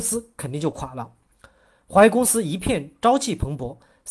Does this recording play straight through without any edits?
yes; 0 cuts

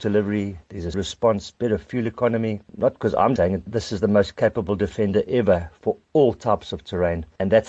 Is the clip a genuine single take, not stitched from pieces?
no; 2 cuts; at 0.9 s, 3.4 s

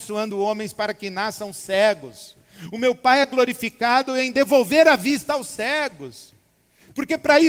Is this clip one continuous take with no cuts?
yes; 0 cuts

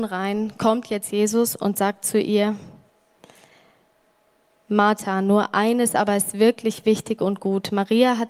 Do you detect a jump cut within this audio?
no; 0 cuts

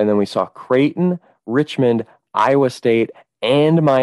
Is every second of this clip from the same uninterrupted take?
yes; 0 cuts

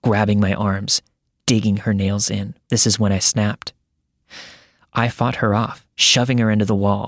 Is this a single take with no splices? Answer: no; 1 cut; at 2.6 s

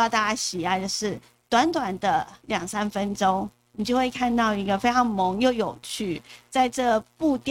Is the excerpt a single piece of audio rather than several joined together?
yes; 0 cuts

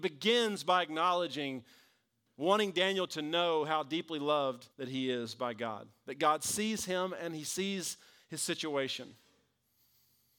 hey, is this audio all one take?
no; 1 cut; at 4.7 s

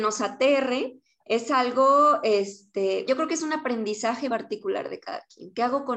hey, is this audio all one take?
no; 2 cuts; at 3.1 s, 4.3 s

